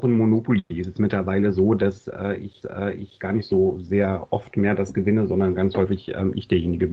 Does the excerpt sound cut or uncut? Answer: cut